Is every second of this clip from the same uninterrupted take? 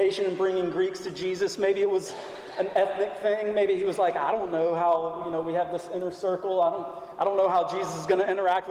yes; 0 cuts

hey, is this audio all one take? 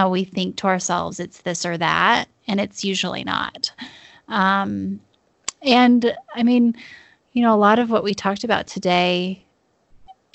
yes; 0 cuts

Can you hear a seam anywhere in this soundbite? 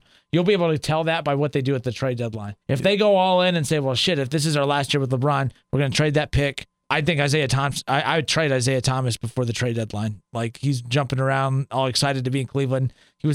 yes; 3 cuts; at 2.6 s, 6.8 s, 10.3 s

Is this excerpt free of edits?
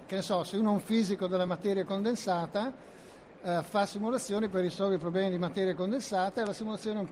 yes; 0 cuts

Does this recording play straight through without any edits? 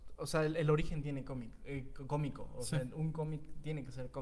yes; 0 cuts

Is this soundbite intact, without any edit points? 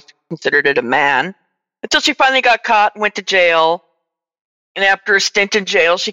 yes; 0 cuts

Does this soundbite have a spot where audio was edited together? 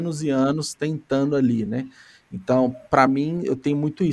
no; 0 cuts

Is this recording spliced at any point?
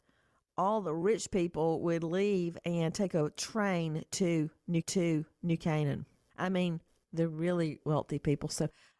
yes; 4 cuts; at 2.6 s, 4.8 s, 6.9 s, 7.8 s

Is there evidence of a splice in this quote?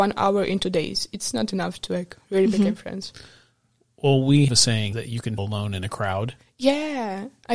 yes; 3 cuts; at 4.5 s, 4.9 s, 5.4 s

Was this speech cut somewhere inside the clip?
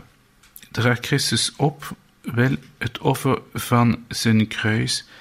no; 0 cuts

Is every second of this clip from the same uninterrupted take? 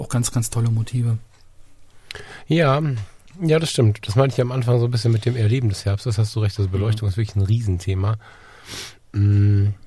yes; 0 cuts

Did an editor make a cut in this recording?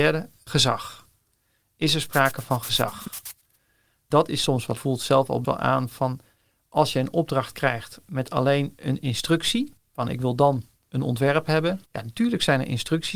yes; 4 cuts; at 4.8 s, 5.4 s, 9.8 s, 11.9 s

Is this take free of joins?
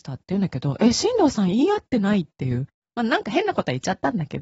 yes; 0 cuts

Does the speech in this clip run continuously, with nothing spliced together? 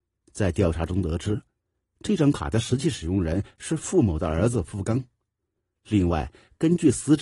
yes; 0 cuts

